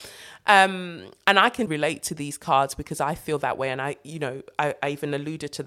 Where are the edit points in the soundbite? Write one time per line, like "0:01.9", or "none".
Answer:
0:01.7